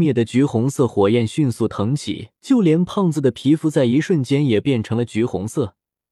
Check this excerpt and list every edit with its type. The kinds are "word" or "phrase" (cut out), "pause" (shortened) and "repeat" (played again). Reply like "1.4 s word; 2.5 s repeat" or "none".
2.4 s pause